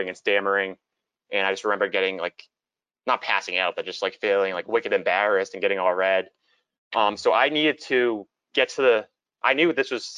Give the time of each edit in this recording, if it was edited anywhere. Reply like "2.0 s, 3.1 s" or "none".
none